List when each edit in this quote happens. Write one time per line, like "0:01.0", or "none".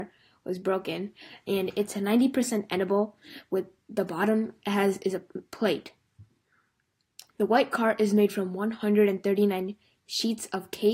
0:07.3